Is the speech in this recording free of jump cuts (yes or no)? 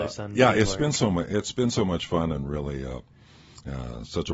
yes